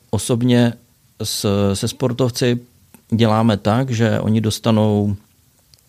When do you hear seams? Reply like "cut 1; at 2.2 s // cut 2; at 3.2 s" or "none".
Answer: none

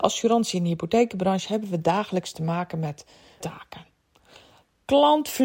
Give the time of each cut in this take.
cut 1; at 3.4 s

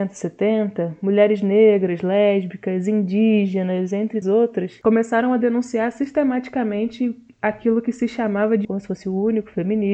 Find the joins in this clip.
cut 1; at 4.2 s // cut 2; at 8.6 s

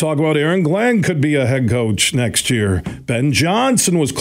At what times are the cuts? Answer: none

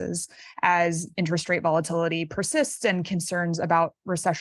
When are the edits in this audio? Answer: none

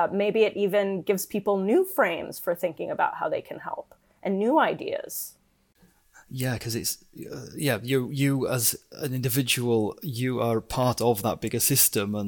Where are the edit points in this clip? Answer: none

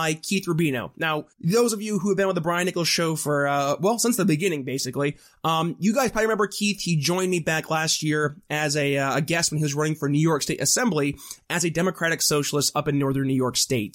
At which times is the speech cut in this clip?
cut 1; at 1.3 s

